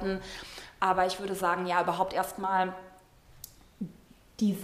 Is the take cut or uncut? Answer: uncut